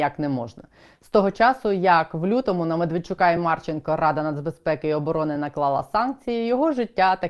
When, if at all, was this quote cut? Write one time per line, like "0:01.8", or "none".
none

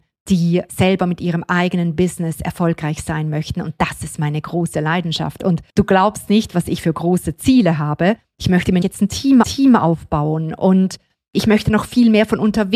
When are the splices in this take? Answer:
0:05.7
0:08.8
0:09.4

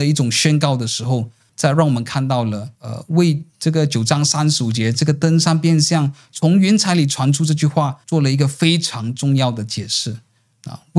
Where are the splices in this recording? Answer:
0:01.5
0:02.8
0:08.0

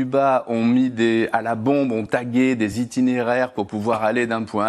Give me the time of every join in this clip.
none

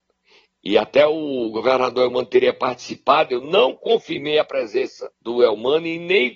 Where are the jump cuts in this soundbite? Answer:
0:05.1

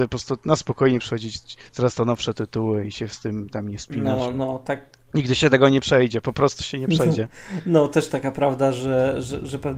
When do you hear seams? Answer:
none

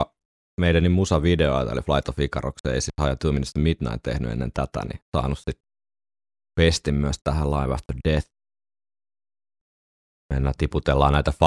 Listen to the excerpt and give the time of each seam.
none

